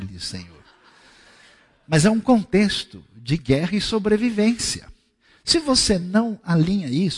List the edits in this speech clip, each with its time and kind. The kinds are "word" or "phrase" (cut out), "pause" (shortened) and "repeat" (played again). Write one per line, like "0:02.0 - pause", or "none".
none